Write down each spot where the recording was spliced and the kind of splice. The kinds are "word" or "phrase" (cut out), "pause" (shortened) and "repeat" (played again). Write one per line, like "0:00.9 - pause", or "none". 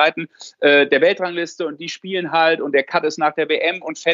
none